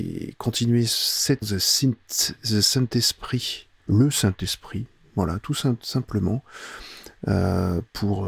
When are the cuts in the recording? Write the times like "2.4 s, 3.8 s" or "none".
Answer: 1.4 s, 3.8 s